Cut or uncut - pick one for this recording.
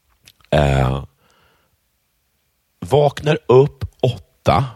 uncut